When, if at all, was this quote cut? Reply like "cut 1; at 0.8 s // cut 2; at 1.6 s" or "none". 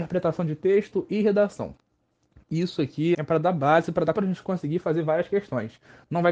cut 1; at 3.1 s // cut 2; at 4.2 s

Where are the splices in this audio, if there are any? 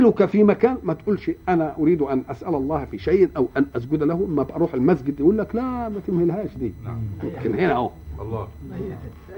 none

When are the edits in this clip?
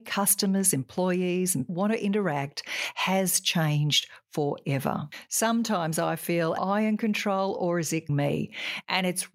cut 1; at 1.7 s // cut 2; at 6.6 s // cut 3; at 8.1 s

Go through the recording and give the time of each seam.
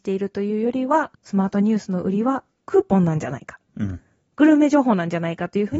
cut 1; at 1.1 s

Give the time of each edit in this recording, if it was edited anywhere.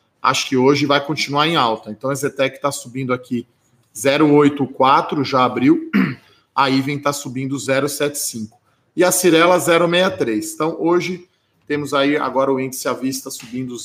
none

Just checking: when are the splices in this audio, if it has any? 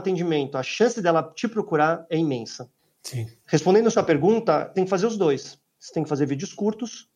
cut 1; at 4.8 s

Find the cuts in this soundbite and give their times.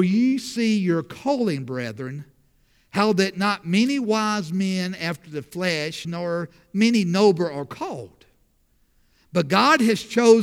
cut 1; at 6.0 s

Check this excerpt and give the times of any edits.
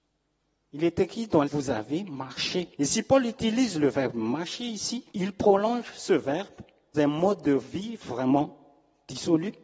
cut 1; at 1.4 s // cut 2; at 2.7 s // cut 3; at 5.1 s // cut 4; at 6.9 s

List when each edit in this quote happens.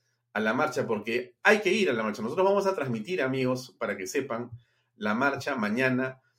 none

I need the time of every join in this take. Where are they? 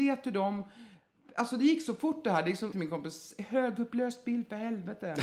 cut 1; at 2.7 s

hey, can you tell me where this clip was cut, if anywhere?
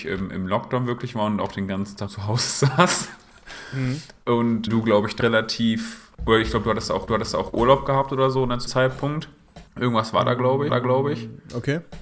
cut 1; at 2.1 s // cut 2; at 4.7 s // cut 3; at 5.2 s // cut 4; at 6.1 s // cut 5; at 7.1 s // cut 6; at 8.7 s // cut 7; at 9.7 s // cut 8; at 10.7 s

